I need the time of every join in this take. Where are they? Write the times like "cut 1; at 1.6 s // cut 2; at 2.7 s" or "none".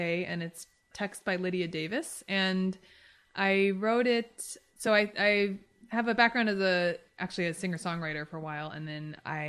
none